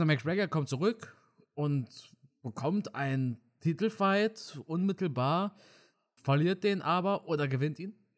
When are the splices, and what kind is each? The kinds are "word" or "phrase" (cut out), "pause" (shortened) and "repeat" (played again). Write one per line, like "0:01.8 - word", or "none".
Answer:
0:06.2 - word